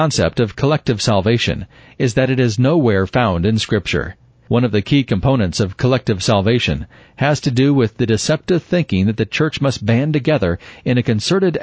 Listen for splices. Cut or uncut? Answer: uncut